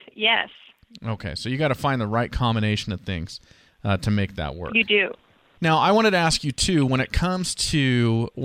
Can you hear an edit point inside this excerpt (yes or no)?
no